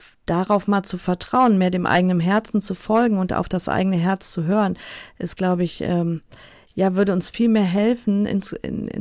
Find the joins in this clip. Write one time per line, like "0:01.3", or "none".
none